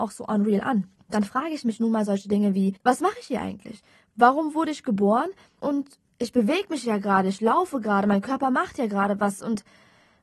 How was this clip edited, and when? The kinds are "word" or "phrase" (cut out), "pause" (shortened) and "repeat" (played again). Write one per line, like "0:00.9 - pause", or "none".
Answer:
none